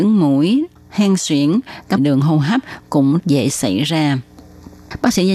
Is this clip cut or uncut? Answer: cut